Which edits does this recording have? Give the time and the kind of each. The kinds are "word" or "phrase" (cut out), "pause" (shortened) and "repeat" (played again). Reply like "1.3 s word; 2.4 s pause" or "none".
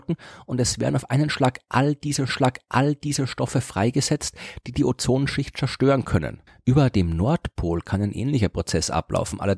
2.3 s repeat

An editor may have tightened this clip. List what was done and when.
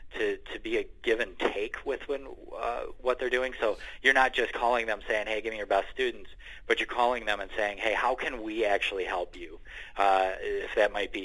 none

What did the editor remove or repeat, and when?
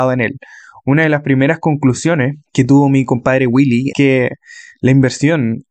2.5 s pause; 3.9 s word

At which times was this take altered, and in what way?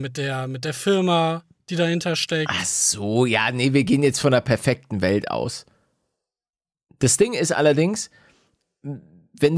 none

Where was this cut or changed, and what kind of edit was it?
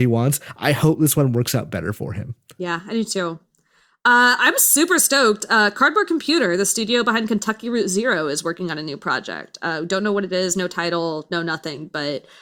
none

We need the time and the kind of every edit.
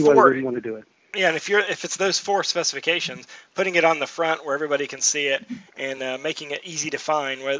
none

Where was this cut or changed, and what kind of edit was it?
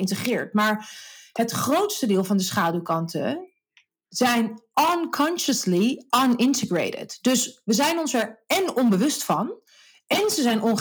none

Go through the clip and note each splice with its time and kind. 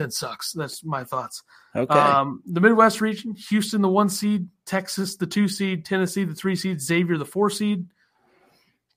none

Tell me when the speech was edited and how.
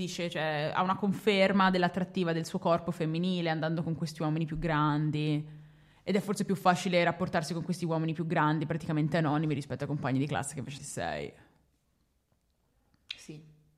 10.8 s phrase

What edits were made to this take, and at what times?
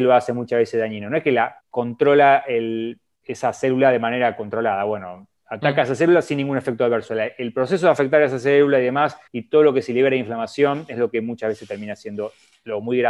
1.6 s pause; 5.4 s pause; 9.3 s pause

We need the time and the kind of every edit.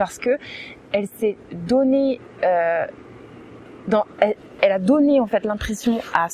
none

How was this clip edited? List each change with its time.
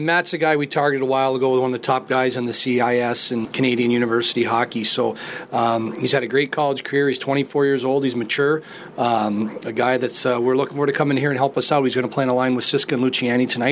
3.4 s word

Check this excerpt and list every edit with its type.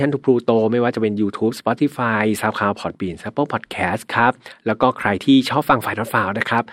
none

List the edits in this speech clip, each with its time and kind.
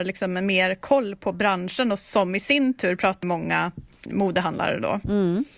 3.2 s word; 4.1 s word

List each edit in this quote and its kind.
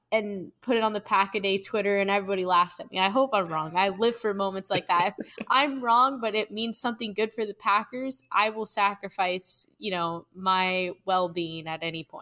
none

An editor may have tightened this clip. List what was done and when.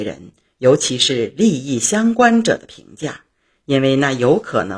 none

